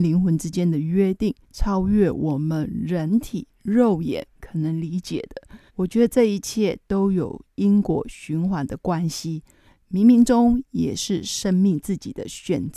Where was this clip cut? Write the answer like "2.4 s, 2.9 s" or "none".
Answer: 1.4 s, 5.7 s